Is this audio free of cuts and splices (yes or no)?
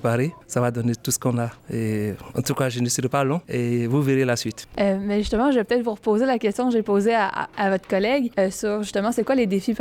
no